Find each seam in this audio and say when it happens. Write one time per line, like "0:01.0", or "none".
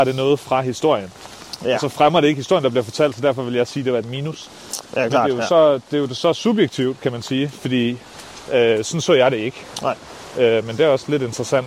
none